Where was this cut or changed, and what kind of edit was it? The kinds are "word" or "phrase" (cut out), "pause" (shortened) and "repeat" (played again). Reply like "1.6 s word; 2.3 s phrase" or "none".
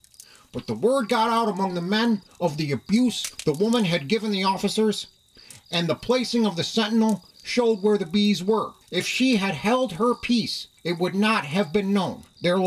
8.8 s pause; 10.8 s pause